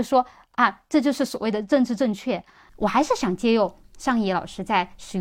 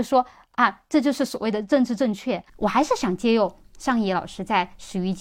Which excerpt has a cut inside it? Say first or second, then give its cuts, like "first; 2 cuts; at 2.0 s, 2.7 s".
second; 1 cut; at 2.5 s